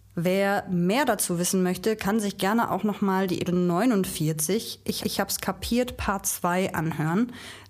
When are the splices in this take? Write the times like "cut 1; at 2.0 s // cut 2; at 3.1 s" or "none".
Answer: cut 1; at 3.4 s // cut 2; at 5.0 s